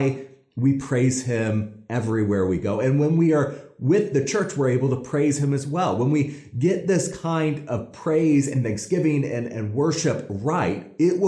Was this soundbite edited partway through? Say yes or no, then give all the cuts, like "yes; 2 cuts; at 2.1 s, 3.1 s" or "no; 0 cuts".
no; 0 cuts